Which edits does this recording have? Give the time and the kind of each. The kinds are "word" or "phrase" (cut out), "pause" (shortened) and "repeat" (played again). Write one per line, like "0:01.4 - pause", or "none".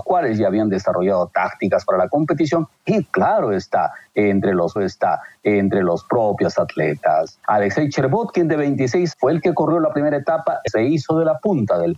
0:04.8 - repeat
0:09.1 - word
0:10.7 - word

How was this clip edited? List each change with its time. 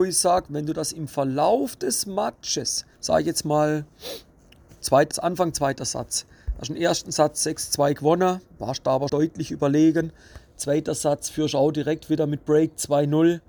0:02.9 - pause
0:05.1 - word
0:09.1 - word

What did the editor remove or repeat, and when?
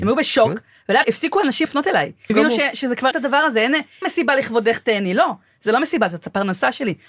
0:01.0 - word
0:01.6 - word
0:02.3 - word
0:03.1 - word
0:04.0 - word

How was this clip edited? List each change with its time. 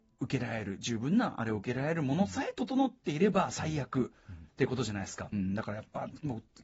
0:05.3 - phrase

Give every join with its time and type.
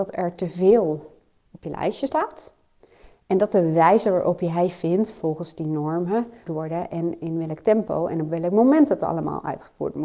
0:06.5 - phrase

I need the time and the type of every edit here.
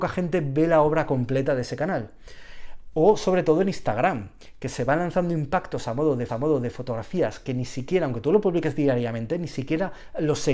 0:06.3 - repeat

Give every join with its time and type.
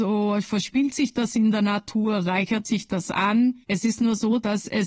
0:03.6 - pause

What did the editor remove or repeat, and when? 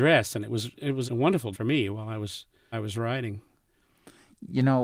0:01.1 - word
0:01.5 - word
0:02.7 - word

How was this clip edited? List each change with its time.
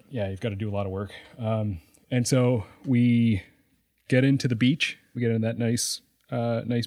0:05.1 - word

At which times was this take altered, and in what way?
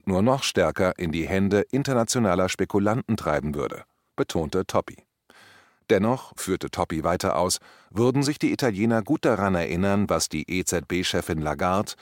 0:06.4 - word

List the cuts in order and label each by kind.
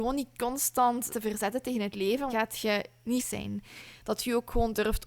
0:01.1 - word
0:02.3 - phrase
0:03.2 - word

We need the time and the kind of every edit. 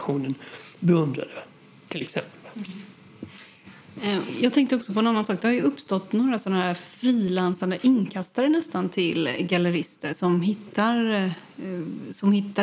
none

